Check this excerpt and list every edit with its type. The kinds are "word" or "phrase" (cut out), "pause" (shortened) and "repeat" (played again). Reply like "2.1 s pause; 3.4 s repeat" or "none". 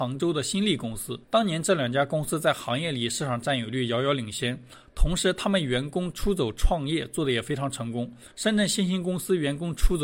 1.2 s pause; 8.3 s pause

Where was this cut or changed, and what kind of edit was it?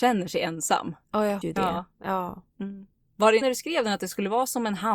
1.0 s pause; 1.4 s word; 3.4 s phrase

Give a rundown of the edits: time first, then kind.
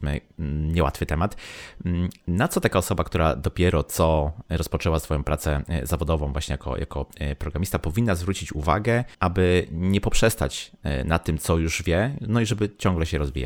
9.1 s pause

